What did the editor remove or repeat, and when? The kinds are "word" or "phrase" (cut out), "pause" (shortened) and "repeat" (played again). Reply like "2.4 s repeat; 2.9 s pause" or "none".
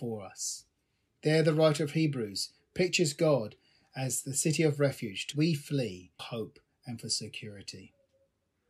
5.3 s word; 6.2 s word